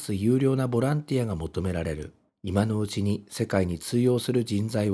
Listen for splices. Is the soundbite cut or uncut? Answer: cut